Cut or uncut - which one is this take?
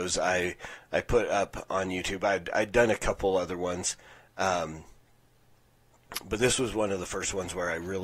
uncut